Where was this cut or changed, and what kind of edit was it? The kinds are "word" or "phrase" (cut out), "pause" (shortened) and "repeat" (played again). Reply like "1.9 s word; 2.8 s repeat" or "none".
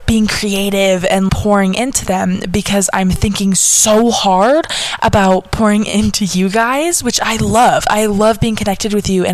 1.3 s word